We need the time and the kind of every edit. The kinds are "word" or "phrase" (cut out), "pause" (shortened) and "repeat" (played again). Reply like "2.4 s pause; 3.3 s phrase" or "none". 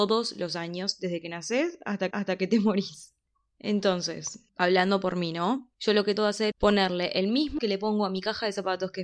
2.1 s repeat; 4.5 s pause; 5.7 s pause; 6.2 s word; 6.5 s word; 7.6 s word